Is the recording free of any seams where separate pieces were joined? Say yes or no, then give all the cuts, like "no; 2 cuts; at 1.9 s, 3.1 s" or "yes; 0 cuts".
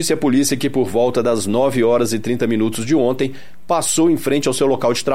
yes; 0 cuts